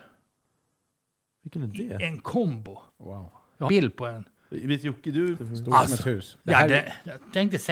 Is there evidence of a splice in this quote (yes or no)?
yes